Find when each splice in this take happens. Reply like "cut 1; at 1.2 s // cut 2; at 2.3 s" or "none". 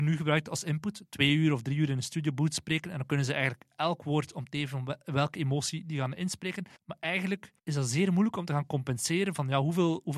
cut 1; at 6.8 s // cut 2; at 7.6 s